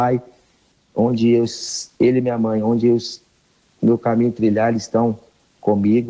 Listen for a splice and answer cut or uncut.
uncut